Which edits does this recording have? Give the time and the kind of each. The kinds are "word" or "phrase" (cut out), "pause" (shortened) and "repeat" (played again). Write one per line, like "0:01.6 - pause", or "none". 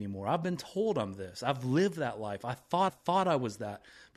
0:02.9 - repeat